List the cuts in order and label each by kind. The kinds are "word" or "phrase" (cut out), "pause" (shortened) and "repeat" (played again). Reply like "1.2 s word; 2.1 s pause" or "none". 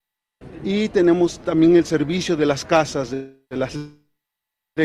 3.4 s pause